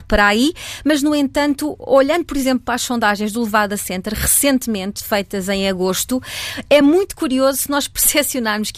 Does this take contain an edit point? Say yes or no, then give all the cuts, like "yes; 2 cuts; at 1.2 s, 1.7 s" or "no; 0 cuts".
no; 0 cuts